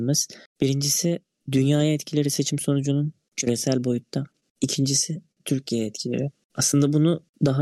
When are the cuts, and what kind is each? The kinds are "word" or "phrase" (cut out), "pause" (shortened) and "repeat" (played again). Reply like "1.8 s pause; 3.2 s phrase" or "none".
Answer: none

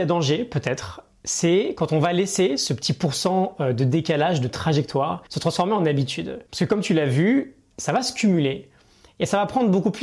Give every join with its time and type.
5.3 s pause; 6.5 s pause

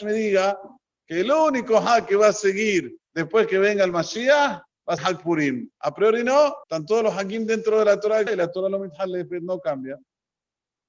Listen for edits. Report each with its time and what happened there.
3.1 s pause; 5.0 s word; 5.7 s pause; 6.6 s pause; 8.3 s word

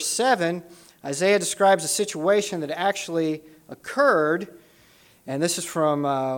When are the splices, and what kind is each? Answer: none

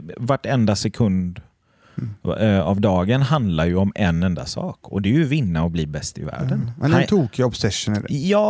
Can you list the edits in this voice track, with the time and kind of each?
none

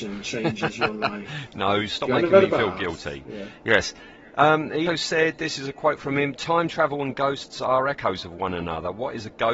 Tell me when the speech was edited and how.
4.9 s word

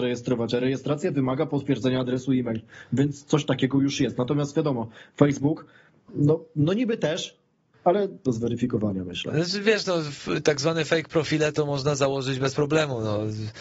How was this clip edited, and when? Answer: 8.3 s phrase

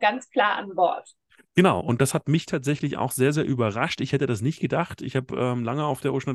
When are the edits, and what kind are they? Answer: none

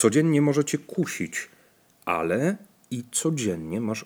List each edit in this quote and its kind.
none

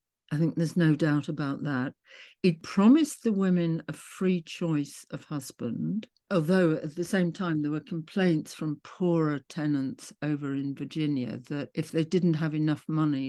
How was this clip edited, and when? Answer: none

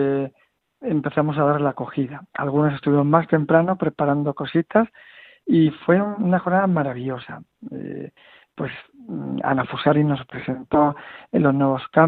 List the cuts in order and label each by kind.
none

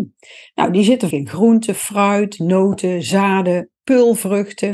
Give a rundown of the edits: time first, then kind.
1.1 s word

